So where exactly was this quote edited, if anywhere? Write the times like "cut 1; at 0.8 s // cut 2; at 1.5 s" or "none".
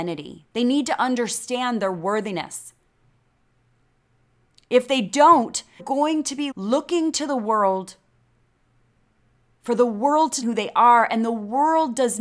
cut 1; at 5.8 s // cut 2; at 6.5 s // cut 3; at 10.4 s